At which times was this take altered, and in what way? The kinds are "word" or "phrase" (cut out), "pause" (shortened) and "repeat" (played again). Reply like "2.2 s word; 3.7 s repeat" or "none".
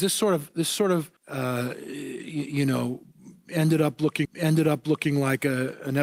1.2 s pause; 4.2 s repeat